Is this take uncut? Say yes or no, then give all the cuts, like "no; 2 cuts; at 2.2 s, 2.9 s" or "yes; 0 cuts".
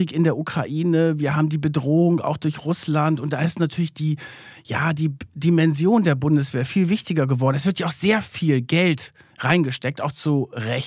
yes; 0 cuts